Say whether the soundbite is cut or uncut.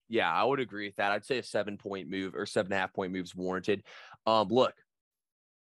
uncut